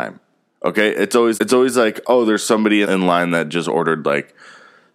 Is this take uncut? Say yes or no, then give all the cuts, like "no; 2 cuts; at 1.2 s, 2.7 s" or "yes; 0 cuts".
no; 2 cuts; at 1.3 s, 2.8 s